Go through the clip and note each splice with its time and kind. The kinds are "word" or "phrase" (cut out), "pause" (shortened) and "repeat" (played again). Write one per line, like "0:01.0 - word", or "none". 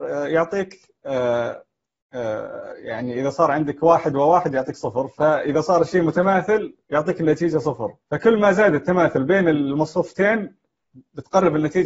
0:06.8 - pause
0:08.0 - pause